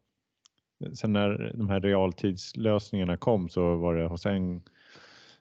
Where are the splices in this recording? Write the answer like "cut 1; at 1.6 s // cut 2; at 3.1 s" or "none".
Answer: none